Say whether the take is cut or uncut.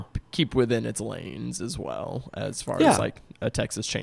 uncut